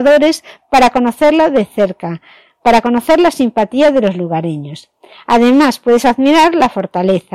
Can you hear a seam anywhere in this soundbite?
no; 0 cuts

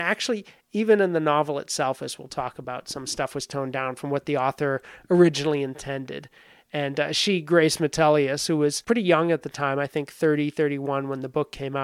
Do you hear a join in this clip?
no; 0 cuts

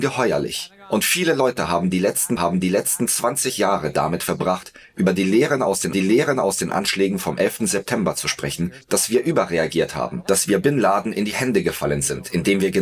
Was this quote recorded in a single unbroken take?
no; 2 cuts; at 2.4 s, 5.9 s

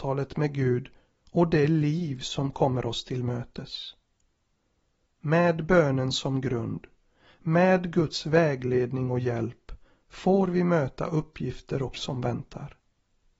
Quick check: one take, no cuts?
no; 1 cut; at 11.9 s

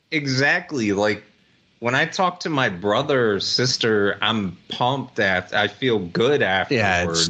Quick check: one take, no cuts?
yes; 0 cuts

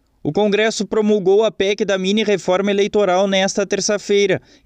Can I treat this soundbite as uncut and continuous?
yes; 0 cuts

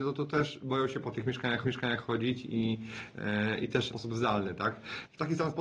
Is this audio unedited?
no; 2 cuts; at 1.6 s, 3.9 s

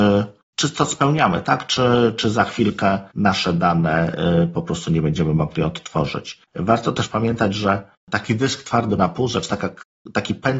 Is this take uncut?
no; 4 cuts; at 3.1 s, 6.5 s, 8.0 s, 9.0 s

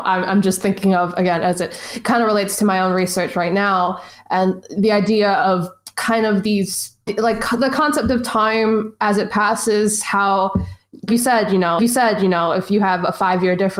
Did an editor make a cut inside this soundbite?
yes; 3 cuts; at 7.1 s, 11.1 s, 11.8 s

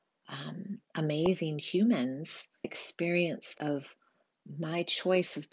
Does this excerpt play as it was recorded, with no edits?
no; 2 cuts; at 2.6 s, 3.6 s

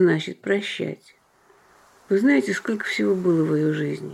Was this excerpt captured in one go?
yes; 0 cuts

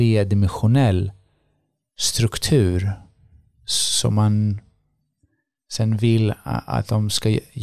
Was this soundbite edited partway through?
no; 0 cuts

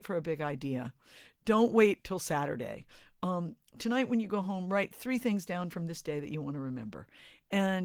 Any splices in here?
no; 0 cuts

